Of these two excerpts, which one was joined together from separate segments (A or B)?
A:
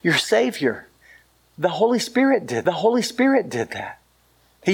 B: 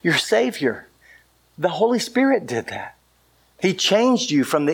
A